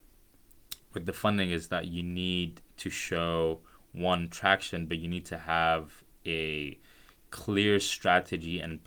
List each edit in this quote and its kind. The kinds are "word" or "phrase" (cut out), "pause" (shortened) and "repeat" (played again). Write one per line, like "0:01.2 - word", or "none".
none